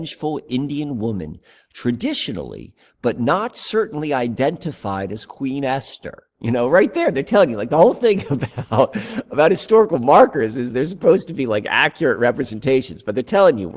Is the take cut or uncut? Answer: uncut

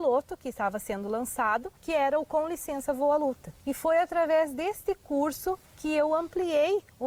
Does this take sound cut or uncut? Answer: cut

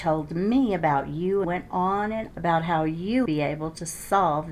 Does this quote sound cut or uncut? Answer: cut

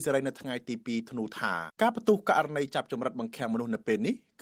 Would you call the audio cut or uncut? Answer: cut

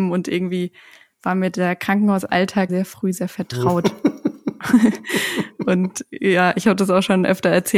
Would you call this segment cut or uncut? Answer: cut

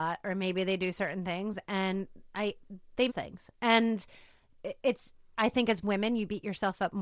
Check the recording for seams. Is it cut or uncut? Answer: cut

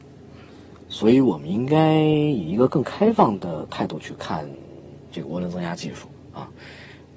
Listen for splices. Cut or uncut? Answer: uncut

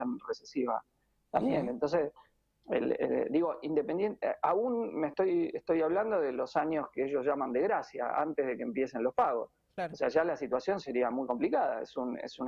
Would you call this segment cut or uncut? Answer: uncut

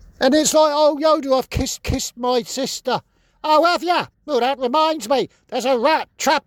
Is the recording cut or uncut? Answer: cut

